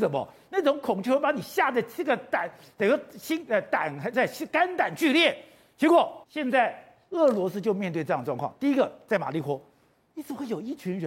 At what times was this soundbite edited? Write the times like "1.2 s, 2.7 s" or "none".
6.2 s